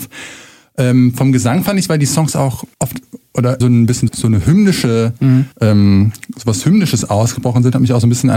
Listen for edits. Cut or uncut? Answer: cut